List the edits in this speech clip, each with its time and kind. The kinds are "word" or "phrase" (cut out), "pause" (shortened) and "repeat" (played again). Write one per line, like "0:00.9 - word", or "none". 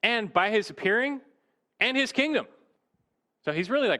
none